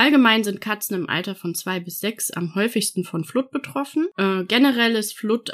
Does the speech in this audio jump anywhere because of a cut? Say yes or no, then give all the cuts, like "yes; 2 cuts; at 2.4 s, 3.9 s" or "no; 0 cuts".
no; 0 cuts